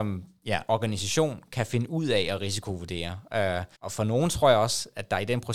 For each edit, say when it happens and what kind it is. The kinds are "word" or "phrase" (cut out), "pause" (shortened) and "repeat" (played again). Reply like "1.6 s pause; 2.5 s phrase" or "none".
3.7 s pause